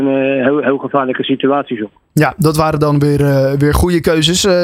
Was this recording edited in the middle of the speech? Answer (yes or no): no